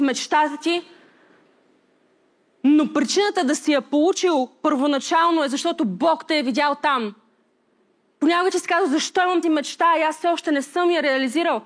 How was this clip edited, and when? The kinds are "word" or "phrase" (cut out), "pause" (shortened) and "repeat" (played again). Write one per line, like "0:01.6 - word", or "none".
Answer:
0:09.4 - word